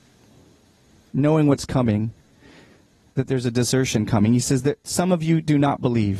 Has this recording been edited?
no; 0 cuts

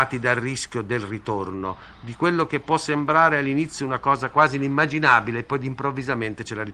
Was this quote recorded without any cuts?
yes; 0 cuts

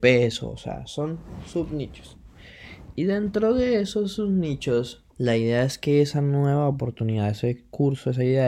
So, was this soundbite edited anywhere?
yes; 1 cut; at 5.1 s

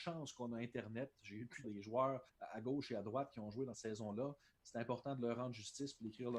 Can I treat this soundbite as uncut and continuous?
no; 3 cuts; at 1.6 s, 2.3 s, 3.7 s

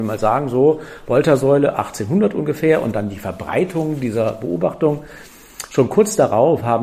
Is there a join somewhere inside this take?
no; 0 cuts

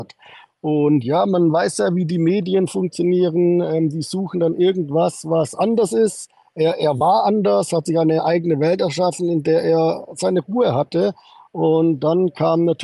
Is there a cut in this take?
no; 0 cuts

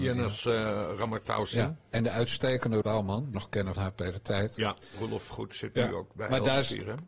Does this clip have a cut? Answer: yes; 4 cuts; at 2.8 s, 3.3 s, 3.8 s, 5.3 s

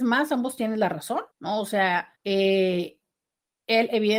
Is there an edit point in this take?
yes; 2 cuts; at 1.3 s, 2.2 s

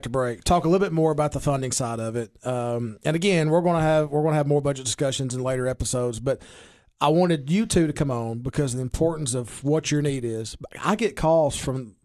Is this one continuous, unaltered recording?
yes; 0 cuts

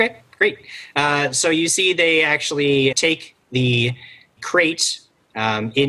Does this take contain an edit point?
yes; 2 cuts; at 2.9 s, 4.4 s

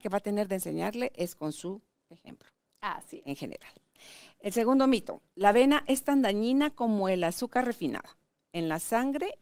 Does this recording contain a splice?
no; 0 cuts

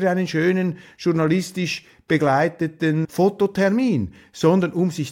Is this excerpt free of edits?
no; 1 cut; at 3.0 s

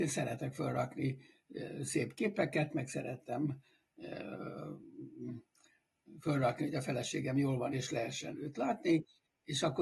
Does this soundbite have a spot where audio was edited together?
no; 0 cuts

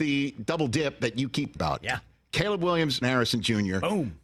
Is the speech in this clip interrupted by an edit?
yes; 2 cuts; at 1.6 s, 3.0 s

